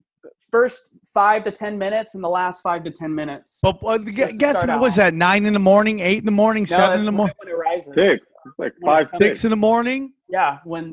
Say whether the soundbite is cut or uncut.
uncut